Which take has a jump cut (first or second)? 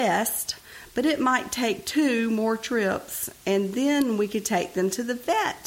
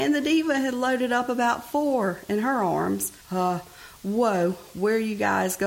second